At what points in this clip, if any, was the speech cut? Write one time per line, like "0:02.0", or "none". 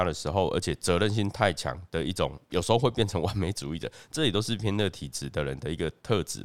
0:02.5